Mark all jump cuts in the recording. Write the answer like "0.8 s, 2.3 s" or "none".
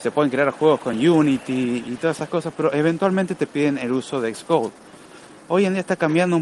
none

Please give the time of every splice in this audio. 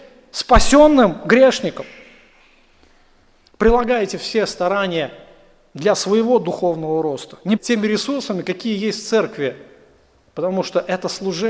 7.6 s

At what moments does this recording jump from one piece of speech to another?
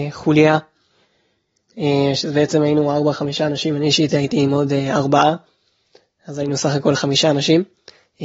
none

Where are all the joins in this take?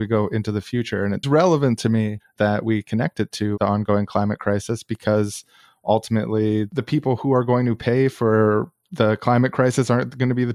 1.2 s

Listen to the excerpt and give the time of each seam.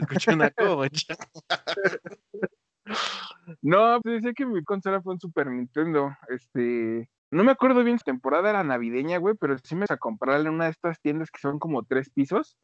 4.0 s, 4.6 s, 7.2 s, 8.0 s, 9.9 s

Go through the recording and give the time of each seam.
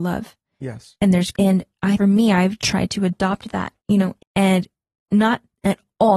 1.3 s, 2.0 s, 3.8 s, 4.2 s

